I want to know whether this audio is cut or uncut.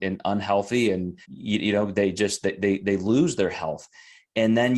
cut